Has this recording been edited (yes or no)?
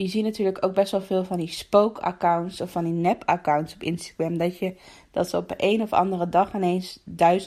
no